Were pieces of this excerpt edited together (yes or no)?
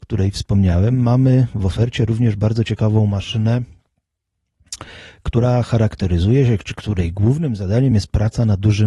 no